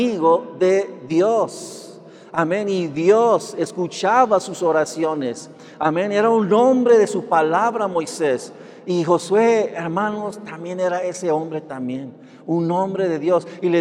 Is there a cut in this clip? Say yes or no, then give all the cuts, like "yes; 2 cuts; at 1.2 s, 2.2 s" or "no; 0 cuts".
no; 0 cuts